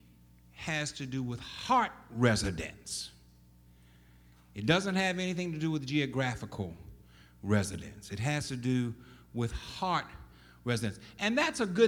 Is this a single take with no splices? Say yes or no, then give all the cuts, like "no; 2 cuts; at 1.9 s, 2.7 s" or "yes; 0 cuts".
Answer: yes; 0 cuts